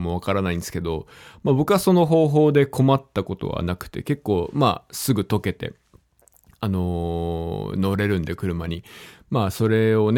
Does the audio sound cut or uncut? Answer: uncut